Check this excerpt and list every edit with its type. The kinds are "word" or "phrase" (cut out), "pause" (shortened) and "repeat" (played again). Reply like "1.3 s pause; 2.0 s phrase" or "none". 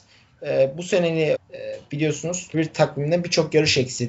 1.3 s word; 2.5 s word

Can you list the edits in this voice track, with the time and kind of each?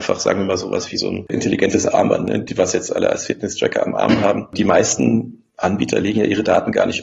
5.5 s pause

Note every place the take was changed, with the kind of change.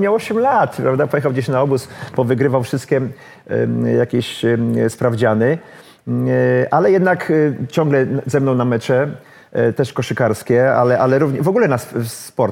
none

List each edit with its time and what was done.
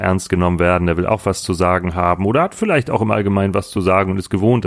none

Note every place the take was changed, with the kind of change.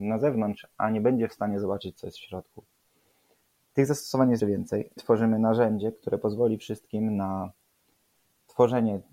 4.4 s word; 5.0 s word

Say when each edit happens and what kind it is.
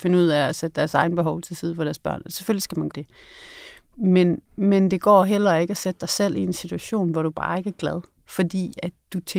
2.9 s word; 4.5 s pause; 8.2 s pause

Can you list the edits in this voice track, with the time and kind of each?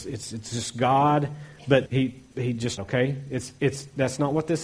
1.9 s word; 2.8 s phrase

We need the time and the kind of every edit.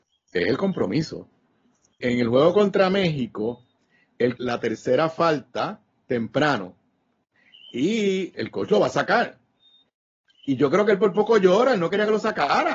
2.0 s phrase; 4.4 s word; 8.3 s word

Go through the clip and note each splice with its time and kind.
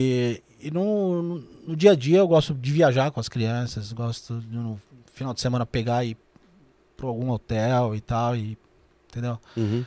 none

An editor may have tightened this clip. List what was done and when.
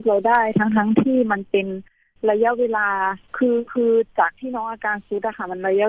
3.3 s pause

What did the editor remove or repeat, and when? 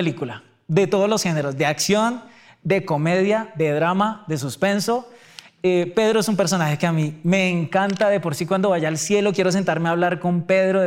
none

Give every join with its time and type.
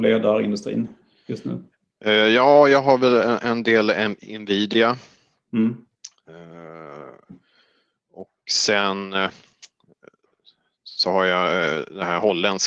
none

